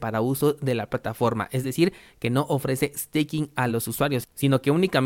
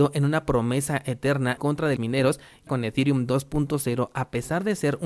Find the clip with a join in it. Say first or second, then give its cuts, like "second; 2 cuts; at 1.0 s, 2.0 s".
second; 3 cuts; at 1.6 s, 2.0 s, 2.7 s